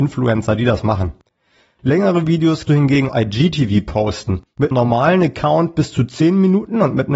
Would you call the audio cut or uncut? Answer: cut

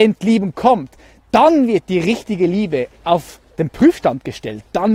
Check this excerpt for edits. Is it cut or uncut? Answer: uncut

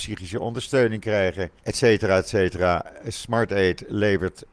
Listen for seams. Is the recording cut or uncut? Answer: cut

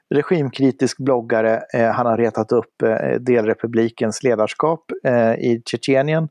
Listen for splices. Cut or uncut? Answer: uncut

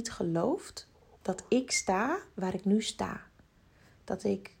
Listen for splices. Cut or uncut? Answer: uncut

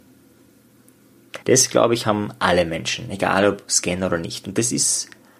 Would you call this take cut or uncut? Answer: cut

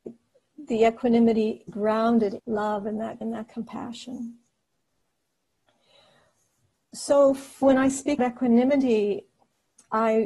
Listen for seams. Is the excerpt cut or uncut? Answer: cut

